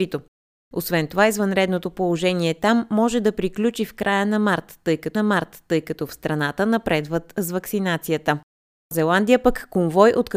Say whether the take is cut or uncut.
cut